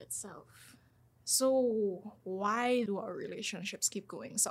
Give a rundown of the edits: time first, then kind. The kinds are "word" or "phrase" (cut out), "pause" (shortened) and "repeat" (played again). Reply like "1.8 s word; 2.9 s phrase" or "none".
2.9 s word